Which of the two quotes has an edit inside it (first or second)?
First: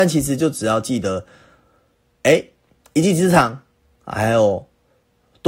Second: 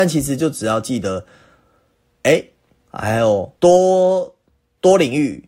second